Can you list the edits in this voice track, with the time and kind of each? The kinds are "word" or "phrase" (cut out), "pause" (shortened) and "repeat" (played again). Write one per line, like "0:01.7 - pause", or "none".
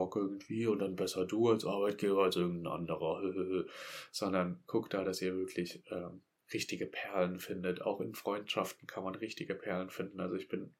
none